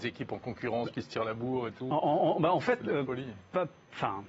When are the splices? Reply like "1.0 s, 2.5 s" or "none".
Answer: 0.9 s